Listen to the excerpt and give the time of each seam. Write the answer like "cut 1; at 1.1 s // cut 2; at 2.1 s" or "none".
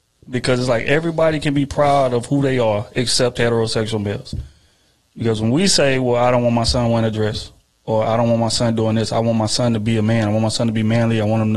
none